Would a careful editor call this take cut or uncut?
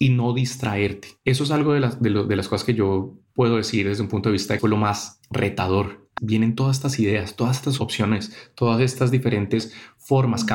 cut